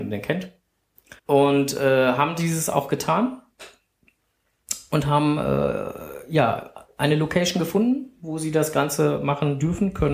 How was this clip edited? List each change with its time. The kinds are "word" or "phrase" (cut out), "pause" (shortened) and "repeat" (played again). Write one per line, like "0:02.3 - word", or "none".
0:01.2 - pause

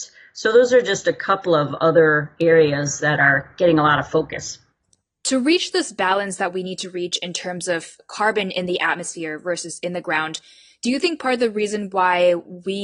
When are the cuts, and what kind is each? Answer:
none

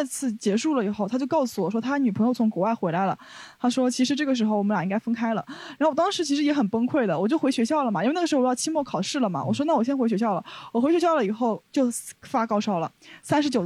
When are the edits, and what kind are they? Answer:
0:11.7 - pause

